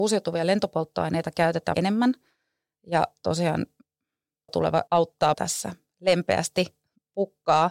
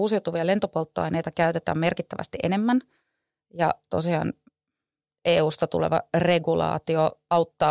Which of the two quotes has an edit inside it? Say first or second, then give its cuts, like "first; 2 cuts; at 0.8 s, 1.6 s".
first; 4 cuts; at 1.7 s, 4.5 s, 4.9 s, 5.3 s